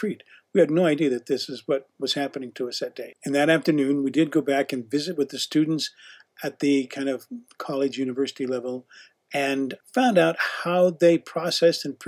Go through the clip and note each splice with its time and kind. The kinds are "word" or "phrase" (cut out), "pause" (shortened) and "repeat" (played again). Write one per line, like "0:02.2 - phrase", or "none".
none